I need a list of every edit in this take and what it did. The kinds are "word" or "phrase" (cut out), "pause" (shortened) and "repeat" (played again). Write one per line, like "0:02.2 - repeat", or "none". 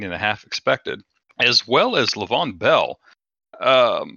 0:01.2 - pause